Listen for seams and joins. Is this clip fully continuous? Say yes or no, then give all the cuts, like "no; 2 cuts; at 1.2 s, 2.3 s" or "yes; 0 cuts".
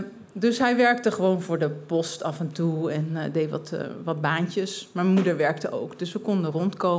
yes; 0 cuts